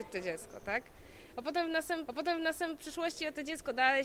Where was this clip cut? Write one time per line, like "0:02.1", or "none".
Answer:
0:02.1